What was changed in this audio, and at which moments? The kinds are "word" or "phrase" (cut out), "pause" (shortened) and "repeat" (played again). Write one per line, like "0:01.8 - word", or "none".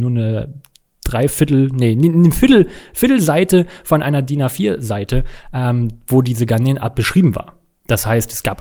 none